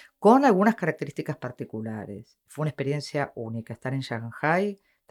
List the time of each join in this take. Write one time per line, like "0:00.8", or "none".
none